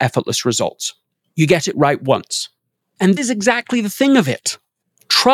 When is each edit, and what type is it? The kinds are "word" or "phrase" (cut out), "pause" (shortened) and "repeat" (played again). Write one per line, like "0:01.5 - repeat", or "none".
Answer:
0:03.2 - word